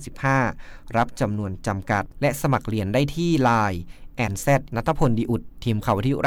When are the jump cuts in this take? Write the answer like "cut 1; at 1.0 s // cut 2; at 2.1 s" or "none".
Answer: cut 1; at 4.3 s // cut 2; at 4.7 s